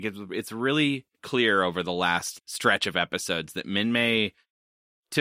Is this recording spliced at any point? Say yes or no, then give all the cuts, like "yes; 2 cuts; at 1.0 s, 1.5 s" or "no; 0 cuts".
yes; 2 cuts; at 1.1 s, 2.4 s